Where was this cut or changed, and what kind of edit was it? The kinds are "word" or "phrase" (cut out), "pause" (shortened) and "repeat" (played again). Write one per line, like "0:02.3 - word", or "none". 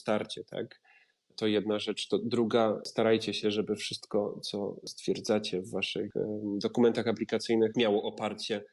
none